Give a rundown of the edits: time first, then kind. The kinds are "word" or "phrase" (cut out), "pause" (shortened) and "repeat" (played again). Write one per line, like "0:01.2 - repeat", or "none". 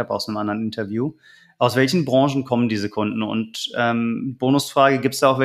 none